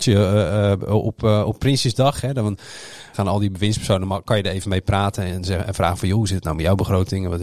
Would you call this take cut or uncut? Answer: uncut